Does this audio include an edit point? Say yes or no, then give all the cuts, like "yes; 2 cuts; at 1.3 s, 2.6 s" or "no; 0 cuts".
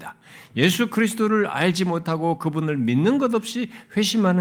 no; 0 cuts